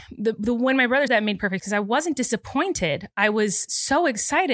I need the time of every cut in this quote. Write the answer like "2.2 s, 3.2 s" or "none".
1.1 s, 1.6 s